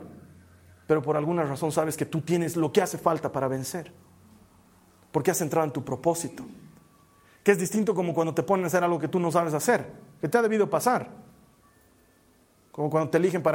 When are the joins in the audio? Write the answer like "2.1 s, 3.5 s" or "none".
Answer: none